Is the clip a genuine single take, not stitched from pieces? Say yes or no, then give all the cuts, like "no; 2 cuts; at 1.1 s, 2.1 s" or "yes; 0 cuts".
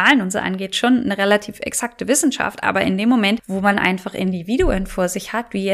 yes; 0 cuts